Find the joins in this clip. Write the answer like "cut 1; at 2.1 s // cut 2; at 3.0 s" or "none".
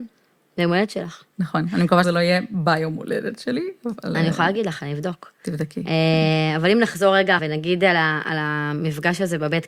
cut 1; at 1.3 s // cut 2; at 2.0 s // cut 3; at 7.4 s